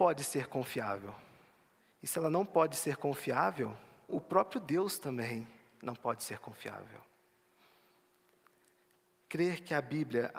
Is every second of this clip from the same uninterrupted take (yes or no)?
no